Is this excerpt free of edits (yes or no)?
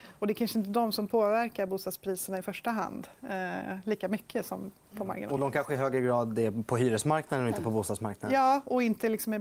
yes